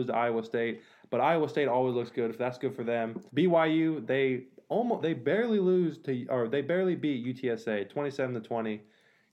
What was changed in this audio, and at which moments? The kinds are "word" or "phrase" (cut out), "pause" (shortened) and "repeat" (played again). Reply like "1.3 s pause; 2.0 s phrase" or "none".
3.3 s pause